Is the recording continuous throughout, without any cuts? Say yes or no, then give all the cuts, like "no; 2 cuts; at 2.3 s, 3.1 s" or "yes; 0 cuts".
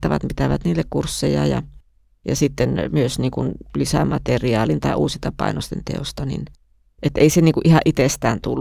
yes; 0 cuts